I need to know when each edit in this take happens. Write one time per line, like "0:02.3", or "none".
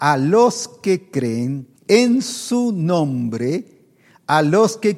0:01.8

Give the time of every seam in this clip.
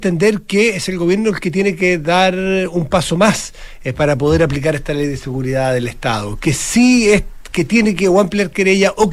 none

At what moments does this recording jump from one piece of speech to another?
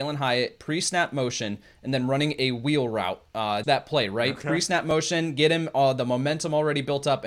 0:03.6

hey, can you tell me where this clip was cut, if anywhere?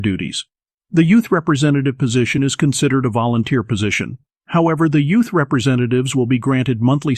none

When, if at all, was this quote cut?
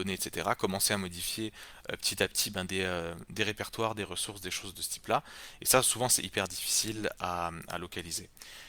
none

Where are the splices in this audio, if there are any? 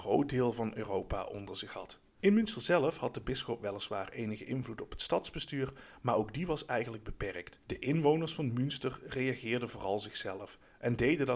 0:02.1
0:07.6

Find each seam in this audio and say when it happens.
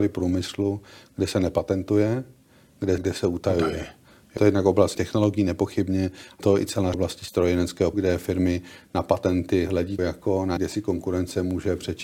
0:03.0
0:04.4
0:04.9
0:06.4
0:06.9
0:07.9
0:10.0
0:10.6

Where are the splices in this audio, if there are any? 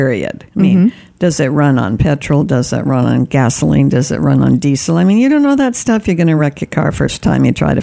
none

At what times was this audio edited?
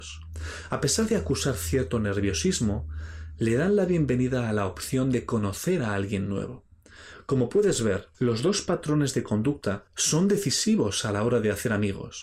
0:08.1
0:09.9

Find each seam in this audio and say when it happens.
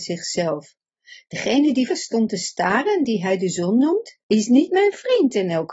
0:01.9
0:04.2

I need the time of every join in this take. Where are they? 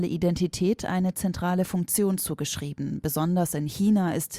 none

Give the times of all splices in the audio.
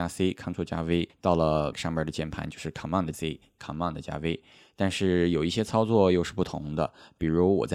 0:01.7
0:03.1

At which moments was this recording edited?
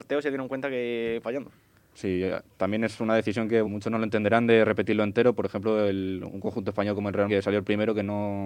0:01.2
0:03.6
0:07.3

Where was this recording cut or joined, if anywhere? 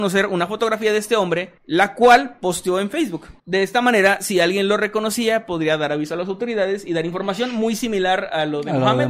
0:01.6
0:03.4

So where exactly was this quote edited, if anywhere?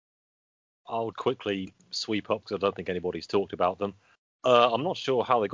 0:01.1
0:02.4
0:04.1

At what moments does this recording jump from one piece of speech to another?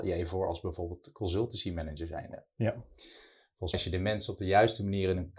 0:03.7

